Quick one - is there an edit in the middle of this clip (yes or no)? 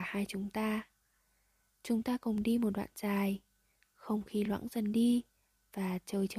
no